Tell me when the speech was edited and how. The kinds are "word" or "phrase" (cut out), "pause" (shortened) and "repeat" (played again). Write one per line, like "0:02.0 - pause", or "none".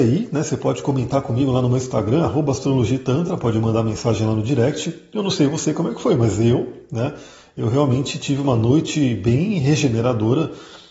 none